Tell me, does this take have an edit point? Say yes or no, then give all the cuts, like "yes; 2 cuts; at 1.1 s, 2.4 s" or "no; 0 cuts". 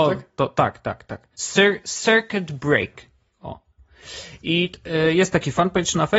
no; 0 cuts